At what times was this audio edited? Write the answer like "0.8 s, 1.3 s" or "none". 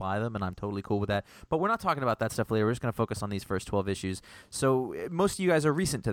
none